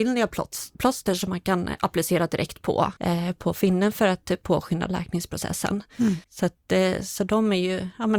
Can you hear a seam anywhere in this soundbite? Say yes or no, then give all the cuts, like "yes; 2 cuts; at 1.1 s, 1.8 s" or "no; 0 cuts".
yes; 2 cuts; at 3.0 s, 6.2 s